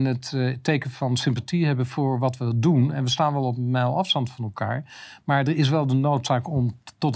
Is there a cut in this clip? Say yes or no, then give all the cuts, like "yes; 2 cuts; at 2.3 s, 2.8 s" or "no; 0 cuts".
no; 0 cuts